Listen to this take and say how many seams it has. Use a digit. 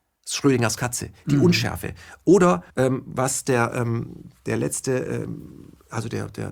1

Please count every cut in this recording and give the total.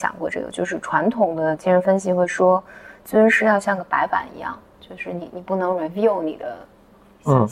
0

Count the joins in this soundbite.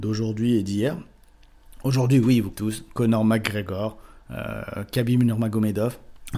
1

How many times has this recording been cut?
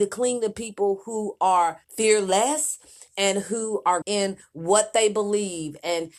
2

